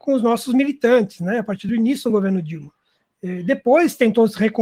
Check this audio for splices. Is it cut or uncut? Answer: uncut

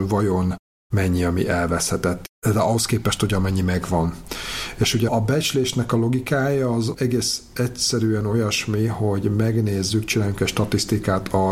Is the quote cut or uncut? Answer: cut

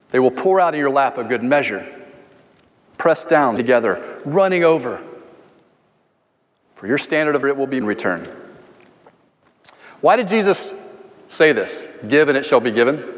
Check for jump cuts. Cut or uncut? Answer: cut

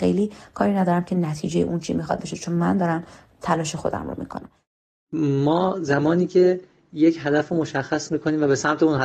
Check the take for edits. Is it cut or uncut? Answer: uncut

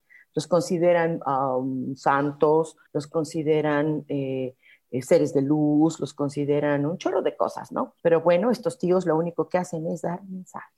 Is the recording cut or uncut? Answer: cut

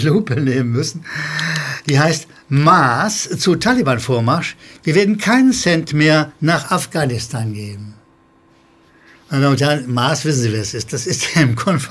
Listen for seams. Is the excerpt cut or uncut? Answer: uncut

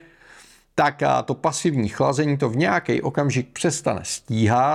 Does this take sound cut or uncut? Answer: uncut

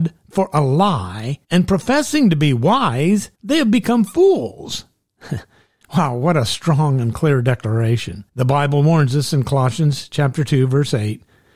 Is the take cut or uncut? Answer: cut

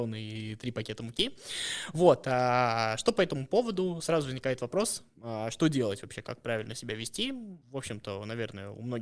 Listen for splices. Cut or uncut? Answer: cut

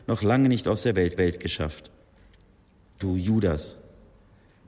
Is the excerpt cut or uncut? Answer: cut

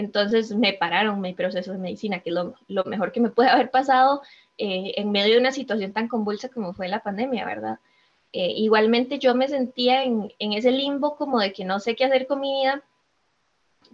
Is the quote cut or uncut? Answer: uncut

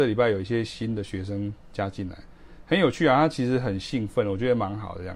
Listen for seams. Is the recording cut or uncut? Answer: uncut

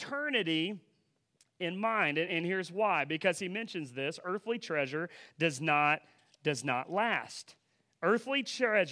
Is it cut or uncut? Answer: uncut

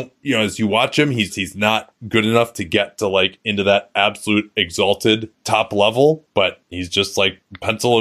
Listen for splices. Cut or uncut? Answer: cut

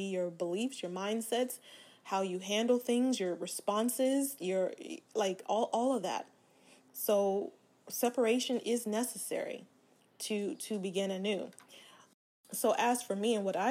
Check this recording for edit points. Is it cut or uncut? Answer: uncut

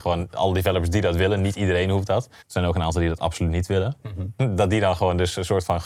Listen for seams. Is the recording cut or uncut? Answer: cut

